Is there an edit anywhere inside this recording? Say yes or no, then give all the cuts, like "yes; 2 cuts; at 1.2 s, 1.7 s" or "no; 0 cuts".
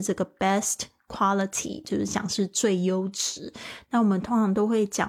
no; 0 cuts